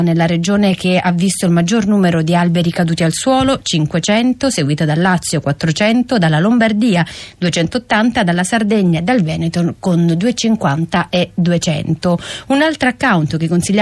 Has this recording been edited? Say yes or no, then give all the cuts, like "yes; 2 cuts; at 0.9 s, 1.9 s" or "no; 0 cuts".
no; 0 cuts